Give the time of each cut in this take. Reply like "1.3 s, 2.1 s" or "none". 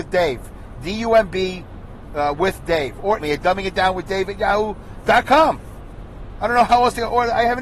3.2 s